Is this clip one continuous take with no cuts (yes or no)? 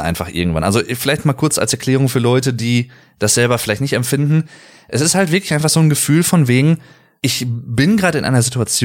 yes